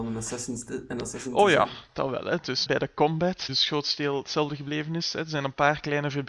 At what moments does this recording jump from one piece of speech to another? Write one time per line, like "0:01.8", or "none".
0:02.7
0:03.5